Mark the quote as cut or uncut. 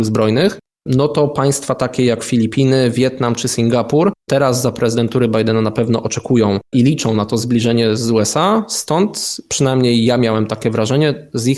cut